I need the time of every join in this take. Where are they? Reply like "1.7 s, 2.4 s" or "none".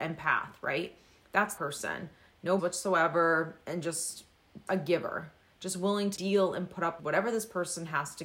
1.6 s, 2.6 s, 4.7 s, 6.2 s, 7.0 s